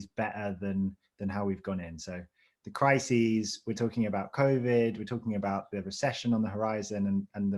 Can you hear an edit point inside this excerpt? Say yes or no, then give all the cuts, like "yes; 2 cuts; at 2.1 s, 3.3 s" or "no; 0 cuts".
no; 0 cuts